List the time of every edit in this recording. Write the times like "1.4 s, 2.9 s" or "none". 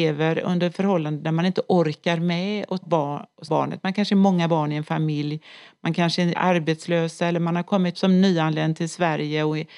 2.8 s, 3.5 s, 6.3 s, 7.9 s

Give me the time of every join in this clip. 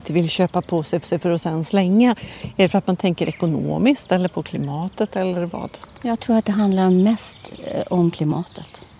1.0 s

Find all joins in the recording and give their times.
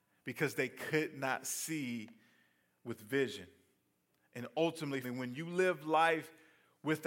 5.0 s

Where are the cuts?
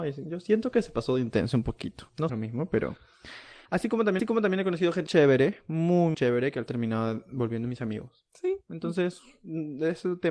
2.3 s, 3.7 s, 4.2 s, 5.1 s, 6.1 s, 6.7 s

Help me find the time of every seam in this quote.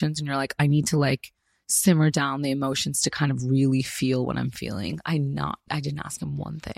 none

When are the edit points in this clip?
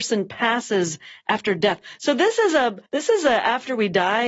2.9 s

